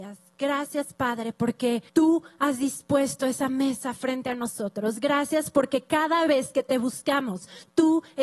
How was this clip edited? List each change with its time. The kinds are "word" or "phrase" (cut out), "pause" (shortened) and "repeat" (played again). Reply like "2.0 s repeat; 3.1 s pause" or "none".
1.9 s pause